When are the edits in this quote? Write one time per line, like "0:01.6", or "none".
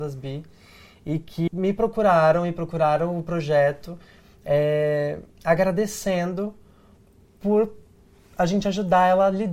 0:01.5